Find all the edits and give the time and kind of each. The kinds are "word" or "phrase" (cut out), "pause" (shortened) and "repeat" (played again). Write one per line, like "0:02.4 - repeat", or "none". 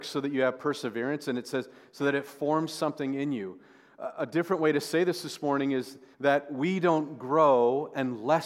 0:06.1 - pause